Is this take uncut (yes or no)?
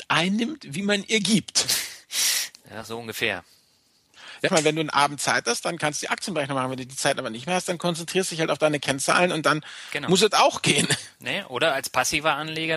no